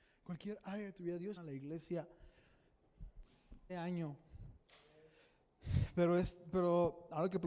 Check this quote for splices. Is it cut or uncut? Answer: cut